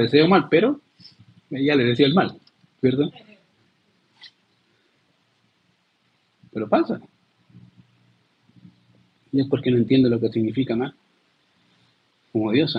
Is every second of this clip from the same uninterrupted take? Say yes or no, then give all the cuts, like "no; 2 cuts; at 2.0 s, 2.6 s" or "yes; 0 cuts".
yes; 0 cuts